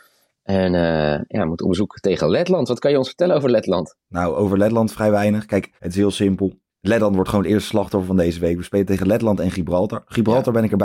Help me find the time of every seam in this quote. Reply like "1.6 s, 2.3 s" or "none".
4.0 s, 5.8 s, 6.7 s